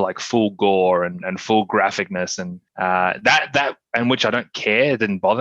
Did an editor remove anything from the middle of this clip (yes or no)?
yes